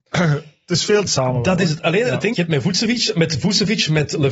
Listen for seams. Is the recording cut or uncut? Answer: cut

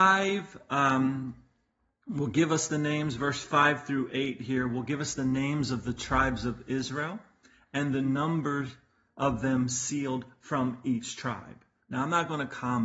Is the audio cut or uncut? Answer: uncut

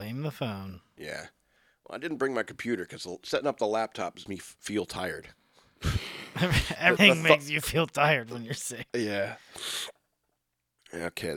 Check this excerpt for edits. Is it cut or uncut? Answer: cut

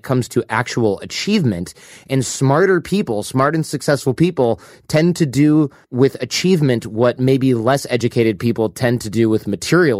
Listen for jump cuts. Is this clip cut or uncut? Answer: uncut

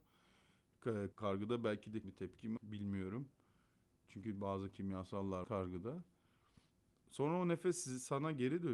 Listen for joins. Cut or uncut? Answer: cut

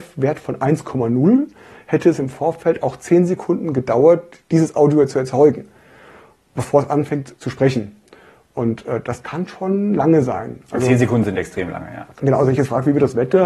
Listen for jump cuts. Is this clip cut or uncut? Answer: uncut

